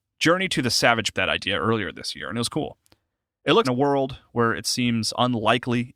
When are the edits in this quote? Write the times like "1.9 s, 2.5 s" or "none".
1.1 s, 3.6 s